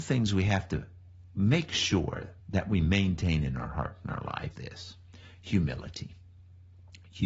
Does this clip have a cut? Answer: yes; 2 cuts; at 2.4 s, 4.5 s

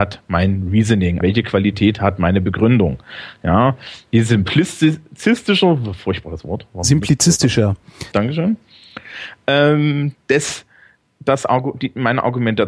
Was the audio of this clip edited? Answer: yes; 2 cuts; at 1.2 s, 8.1 s

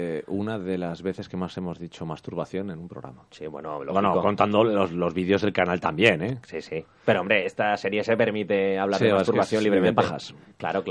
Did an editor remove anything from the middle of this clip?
no; 0 cuts

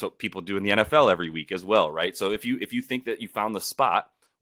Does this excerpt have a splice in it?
no; 0 cuts

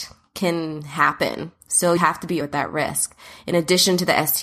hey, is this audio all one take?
no; 2 cuts; at 2.0 s, 2.4 s

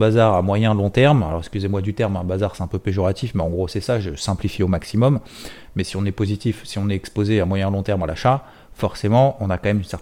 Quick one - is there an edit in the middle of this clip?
no; 0 cuts

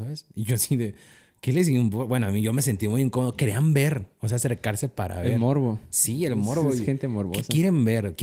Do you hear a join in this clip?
no; 0 cuts

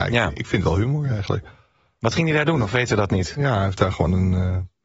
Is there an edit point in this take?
no; 0 cuts

